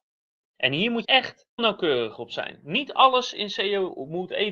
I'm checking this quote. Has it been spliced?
yes; 2 cuts; at 1.0 s, 1.6 s

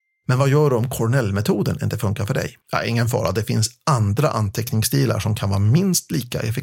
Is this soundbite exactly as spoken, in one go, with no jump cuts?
no; 1 cut; at 2.6 s

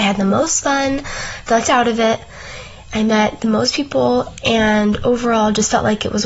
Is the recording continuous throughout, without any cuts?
no; 1 cut; at 1.6 s

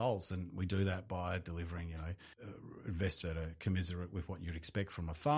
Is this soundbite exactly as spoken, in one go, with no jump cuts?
no; 2 cuts; at 2.3 s, 3.2 s

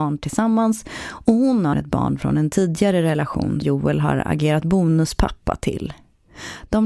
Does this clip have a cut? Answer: yes; 2 cuts; at 1.7 s, 3.6 s

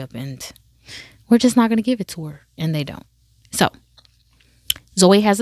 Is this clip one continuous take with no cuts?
yes; 0 cuts

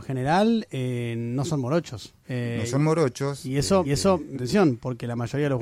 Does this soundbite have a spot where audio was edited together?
yes; 3 cuts; at 2.2 s, 3.8 s, 4.3 s

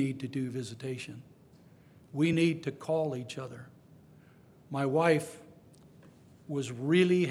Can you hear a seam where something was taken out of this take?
no; 0 cuts

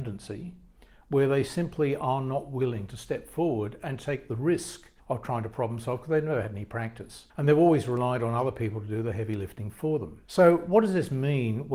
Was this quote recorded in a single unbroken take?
no; 3 cuts; at 5.0 s, 7.3 s, 10.3 s

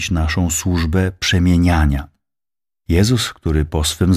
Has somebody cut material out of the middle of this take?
no; 0 cuts

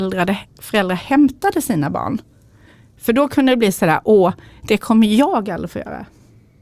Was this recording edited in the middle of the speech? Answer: no; 0 cuts

